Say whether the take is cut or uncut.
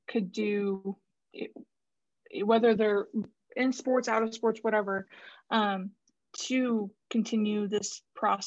uncut